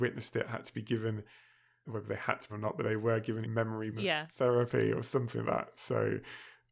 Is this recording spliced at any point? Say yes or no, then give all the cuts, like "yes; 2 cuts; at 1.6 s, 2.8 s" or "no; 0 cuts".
yes; 5 cuts; at 1.8 s, 2.5 s, 3.4 s, 3.9 s, 5.4 s